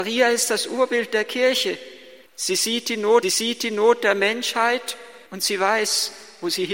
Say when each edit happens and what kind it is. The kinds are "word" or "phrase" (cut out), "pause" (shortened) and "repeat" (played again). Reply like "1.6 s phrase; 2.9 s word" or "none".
2.3 s pause; 3.2 s repeat; 5.3 s pause

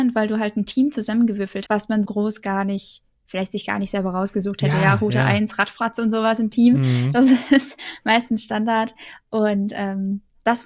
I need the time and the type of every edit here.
1.7 s word; 2.0 s word

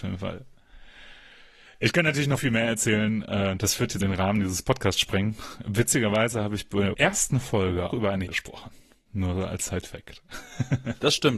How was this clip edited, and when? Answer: 2.4 s word; 4.0 s word; 6.9 s word; 7.9 s word; 8.3 s word

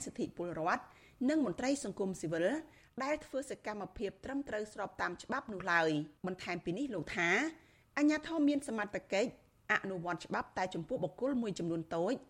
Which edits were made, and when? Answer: 6.2 s pause

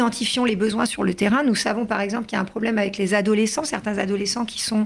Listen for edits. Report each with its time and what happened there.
none

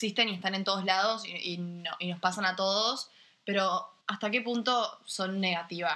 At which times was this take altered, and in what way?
4.0 s pause

